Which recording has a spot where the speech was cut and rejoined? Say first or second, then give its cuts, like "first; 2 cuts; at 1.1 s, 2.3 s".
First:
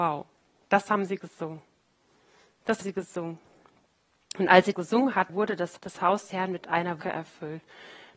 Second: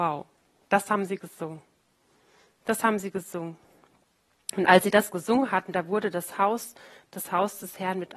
first; 6 cuts; at 2.8 s, 4.7 s, 5.3 s, 5.8 s, 6.3 s, 7.0 s